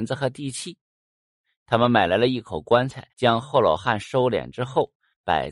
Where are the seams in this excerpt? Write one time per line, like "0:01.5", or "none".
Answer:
0:03.1